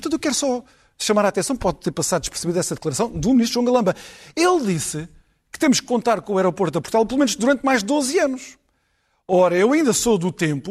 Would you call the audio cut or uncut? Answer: uncut